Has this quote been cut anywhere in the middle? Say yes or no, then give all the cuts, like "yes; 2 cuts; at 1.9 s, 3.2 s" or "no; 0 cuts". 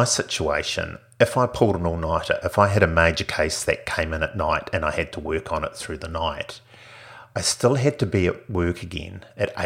no; 0 cuts